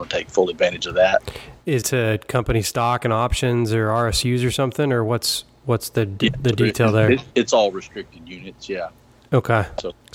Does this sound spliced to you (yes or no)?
yes